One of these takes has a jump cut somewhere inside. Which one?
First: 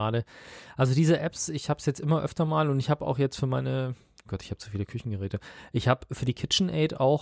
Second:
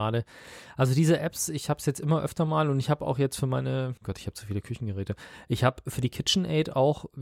second; 1 cut; at 4.0 s

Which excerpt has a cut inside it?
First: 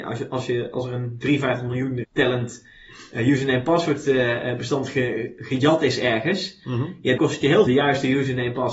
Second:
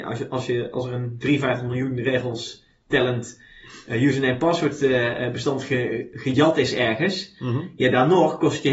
first; 3 cuts; at 2.0 s, 7.2 s, 7.7 s

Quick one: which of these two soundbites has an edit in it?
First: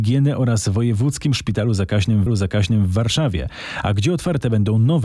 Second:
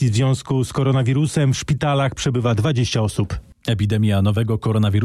first; 1 cut; at 2.3 s

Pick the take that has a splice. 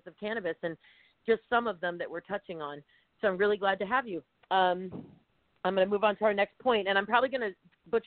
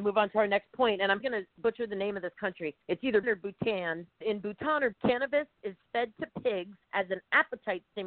second; 7 cuts; at 1.2 s, 1.5 s, 2.8 s, 3.2 s, 4.2 s, 4.9 s, 6.8 s

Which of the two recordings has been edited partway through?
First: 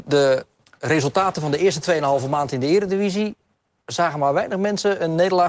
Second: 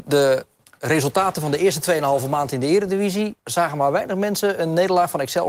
second; 1 cut; at 3.4 s

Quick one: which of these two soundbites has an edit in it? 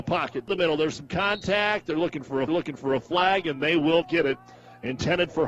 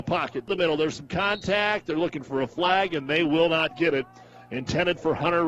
first; 2 cuts; at 2.5 s, 4.0 s

